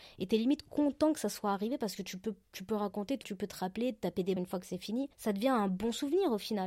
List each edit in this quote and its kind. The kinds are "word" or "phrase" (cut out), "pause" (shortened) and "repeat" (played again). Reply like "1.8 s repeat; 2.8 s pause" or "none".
3.2 s word; 4.4 s word; 5.1 s pause